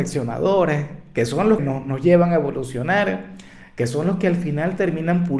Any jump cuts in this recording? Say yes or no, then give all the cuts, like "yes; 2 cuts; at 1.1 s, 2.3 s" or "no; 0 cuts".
yes; 1 cut; at 1.6 s